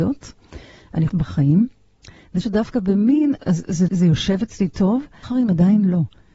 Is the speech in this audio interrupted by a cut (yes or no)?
yes